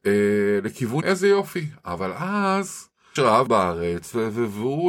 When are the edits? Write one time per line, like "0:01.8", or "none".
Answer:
0:01.0
0:03.2
0:03.5